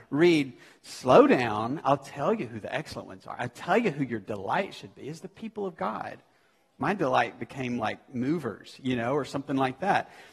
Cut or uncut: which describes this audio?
uncut